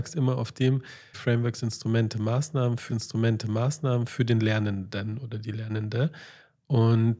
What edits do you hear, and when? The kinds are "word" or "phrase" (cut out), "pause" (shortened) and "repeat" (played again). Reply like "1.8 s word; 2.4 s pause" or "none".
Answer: 1.1 s word; 2.9 s repeat

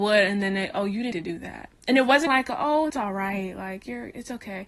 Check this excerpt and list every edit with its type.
1.1 s word; 1.8 s pause; 2.3 s word; 2.9 s word

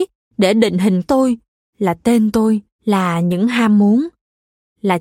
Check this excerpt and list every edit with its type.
1.0 s word; 1.7 s word; 2.7 s pause

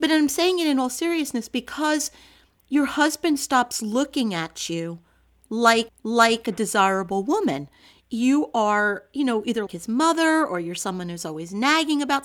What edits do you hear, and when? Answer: 5.9 s repeat; 9.7 s word

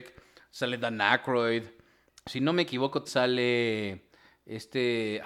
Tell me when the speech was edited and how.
2.1 s pause; 3.0 s word

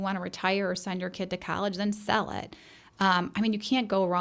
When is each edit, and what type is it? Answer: none

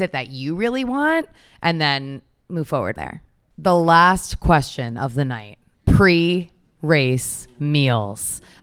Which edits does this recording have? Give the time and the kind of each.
3.0 s word; 5.7 s pause

